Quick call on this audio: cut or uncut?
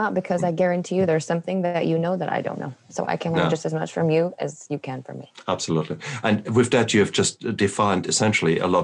uncut